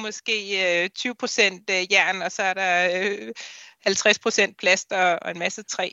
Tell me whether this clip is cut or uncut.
uncut